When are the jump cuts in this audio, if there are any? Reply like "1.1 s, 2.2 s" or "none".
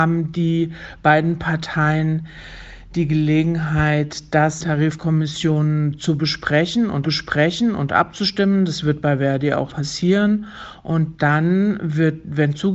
4.6 s, 7.0 s, 9.7 s